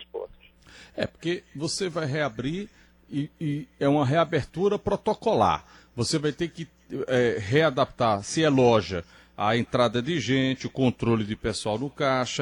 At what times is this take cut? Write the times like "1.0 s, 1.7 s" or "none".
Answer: none